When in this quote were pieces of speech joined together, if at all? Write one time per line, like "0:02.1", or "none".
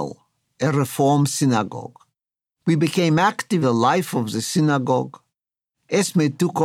0:03.6